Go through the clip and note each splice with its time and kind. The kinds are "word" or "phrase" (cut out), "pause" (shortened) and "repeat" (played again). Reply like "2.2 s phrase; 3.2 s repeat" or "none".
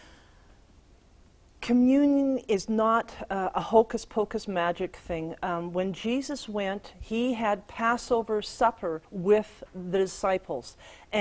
9.0 s pause